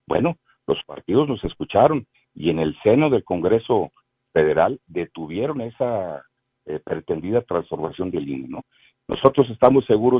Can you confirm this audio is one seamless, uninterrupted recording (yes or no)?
yes